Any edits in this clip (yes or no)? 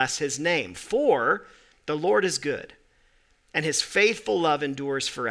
no